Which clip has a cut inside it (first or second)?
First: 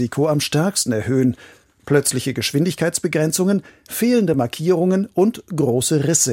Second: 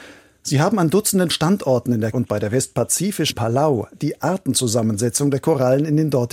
second